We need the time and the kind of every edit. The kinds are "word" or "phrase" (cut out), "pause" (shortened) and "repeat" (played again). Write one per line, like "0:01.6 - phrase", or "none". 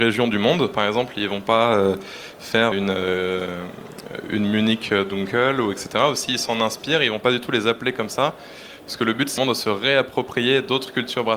0:02.7 - word
0:09.4 - word

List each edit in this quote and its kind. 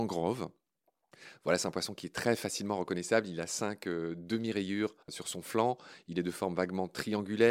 0:05.0 - pause

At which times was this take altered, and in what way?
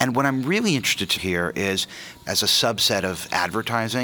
0:01.2 - word
0:02.3 - word

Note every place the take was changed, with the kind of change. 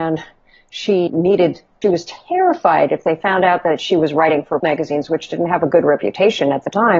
0:01.1 - word
0:01.8 - phrase
0:04.6 - word

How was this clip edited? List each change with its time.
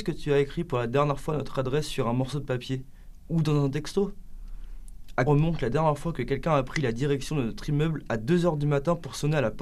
0:05.3 - word

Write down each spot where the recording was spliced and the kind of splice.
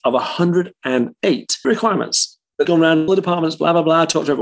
0:01.6 - word
0:02.6 - word
0:03.1 - word

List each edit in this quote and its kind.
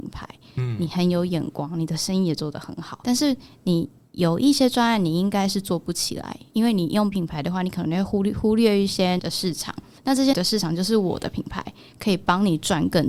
0:03.0 - word
0:07.1 - word
0:09.2 - word
0:10.3 - word

